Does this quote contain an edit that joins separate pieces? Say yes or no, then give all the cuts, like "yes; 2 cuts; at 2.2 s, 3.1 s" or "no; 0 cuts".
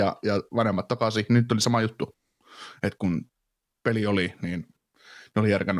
no; 0 cuts